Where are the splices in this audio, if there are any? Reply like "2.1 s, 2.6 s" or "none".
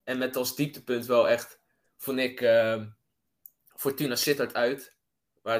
none